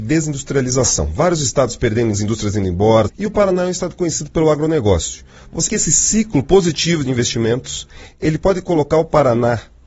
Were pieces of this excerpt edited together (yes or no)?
yes